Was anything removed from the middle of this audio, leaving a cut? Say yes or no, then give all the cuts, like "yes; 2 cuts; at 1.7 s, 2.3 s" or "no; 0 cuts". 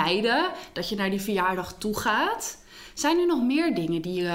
no; 0 cuts